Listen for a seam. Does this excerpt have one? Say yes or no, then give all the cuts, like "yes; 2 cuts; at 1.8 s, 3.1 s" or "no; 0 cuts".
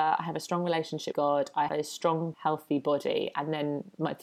yes; 3 cuts; at 1.1 s, 1.7 s, 2.3 s